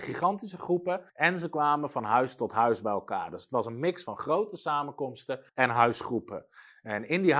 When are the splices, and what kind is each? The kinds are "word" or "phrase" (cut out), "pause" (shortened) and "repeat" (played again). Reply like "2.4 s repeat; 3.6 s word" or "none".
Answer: 1.1 s pause; 5.5 s pause